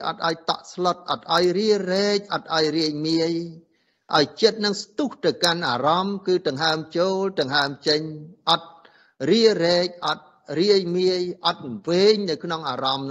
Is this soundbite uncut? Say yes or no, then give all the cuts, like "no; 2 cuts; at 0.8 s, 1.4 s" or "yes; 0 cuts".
yes; 0 cuts